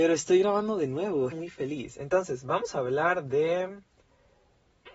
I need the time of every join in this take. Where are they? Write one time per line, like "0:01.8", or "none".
0:01.3